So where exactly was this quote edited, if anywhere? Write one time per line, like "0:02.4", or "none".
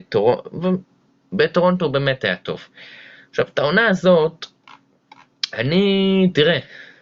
none